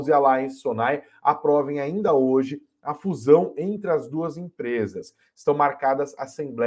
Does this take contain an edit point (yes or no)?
no